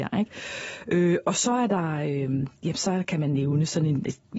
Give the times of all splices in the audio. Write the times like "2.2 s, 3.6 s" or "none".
none